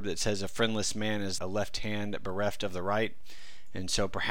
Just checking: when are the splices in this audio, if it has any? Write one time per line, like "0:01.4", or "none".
0:01.4